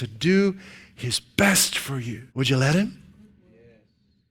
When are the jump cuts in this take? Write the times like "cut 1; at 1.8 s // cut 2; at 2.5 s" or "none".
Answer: cut 1; at 2.3 s